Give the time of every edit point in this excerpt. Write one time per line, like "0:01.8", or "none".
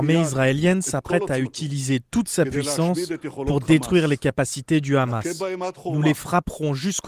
none